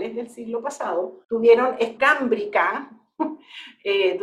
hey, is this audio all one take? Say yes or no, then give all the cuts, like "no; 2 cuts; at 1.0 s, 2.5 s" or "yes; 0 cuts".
no; 2 cuts; at 1.2 s, 2.0 s